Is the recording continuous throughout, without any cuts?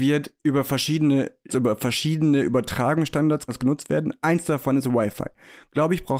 no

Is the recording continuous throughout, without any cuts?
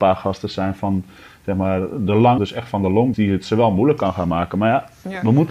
no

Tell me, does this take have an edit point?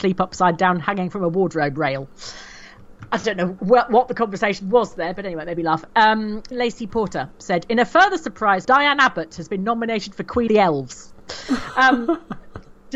yes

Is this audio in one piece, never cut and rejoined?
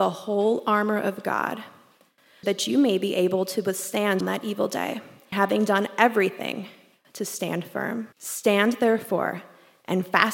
no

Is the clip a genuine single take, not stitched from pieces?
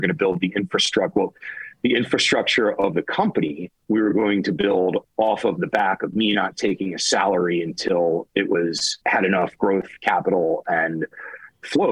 no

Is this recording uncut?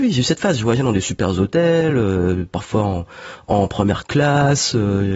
yes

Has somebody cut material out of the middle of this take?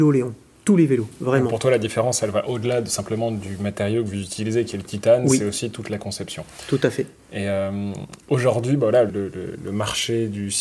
yes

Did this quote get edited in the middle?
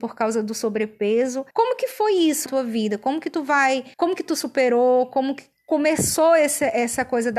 yes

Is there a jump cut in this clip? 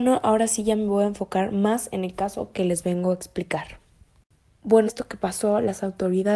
yes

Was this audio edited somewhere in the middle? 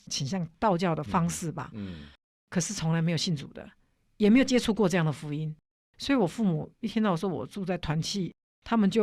no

